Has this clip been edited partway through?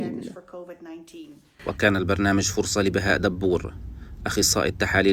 no; 0 cuts

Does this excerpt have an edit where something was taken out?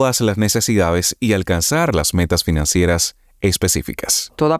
no; 0 cuts

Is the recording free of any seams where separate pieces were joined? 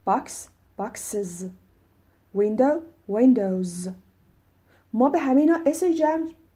yes; 0 cuts

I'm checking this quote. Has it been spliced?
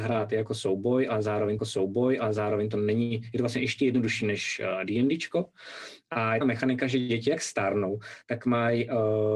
yes; 2 cuts; at 1.6 s, 6.4 s

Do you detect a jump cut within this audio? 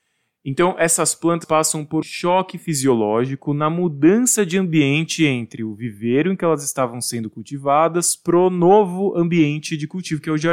yes; 2 cuts; at 1.4 s, 2.0 s

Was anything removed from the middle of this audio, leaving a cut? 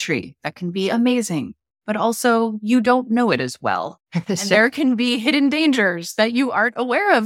no; 0 cuts

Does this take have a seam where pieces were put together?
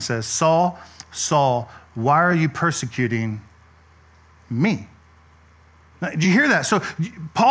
no; 0 cuts

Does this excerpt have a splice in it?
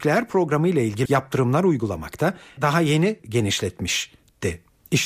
yes; 3 cuts; at 1.1 s, 2.6 s, 3.2 s

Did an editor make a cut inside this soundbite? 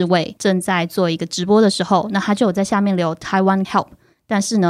yes; 1 cut; at 3.6 s

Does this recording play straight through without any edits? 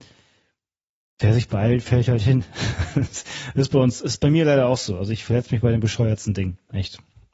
yes; 0 cuts

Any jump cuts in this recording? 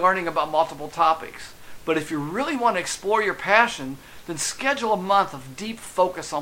no; 0 cuts

